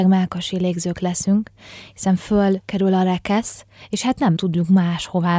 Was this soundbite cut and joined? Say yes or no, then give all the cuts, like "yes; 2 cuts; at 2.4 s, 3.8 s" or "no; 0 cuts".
yes; 2 cuts; at 2.6 s, 4.4 s